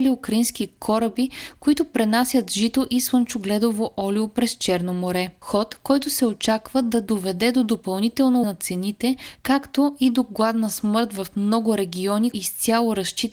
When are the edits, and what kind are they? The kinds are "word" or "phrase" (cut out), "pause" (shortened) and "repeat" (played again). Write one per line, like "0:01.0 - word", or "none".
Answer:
0:08.4 - word
0:12.3 - word

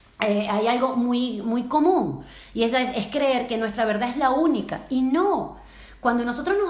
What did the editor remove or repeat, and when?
none

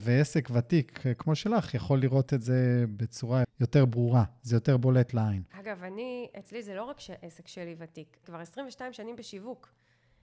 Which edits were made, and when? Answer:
0:03.4 - word
0:05.5 - pause
0:08.2 - word

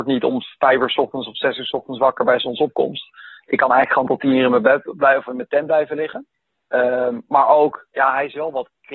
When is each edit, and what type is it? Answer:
0:06.3 - pause

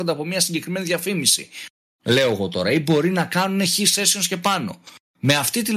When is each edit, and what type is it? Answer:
none

